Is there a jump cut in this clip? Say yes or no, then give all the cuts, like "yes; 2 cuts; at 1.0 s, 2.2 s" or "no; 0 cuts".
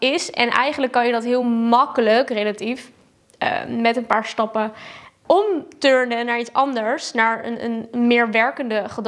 no; 0 cuts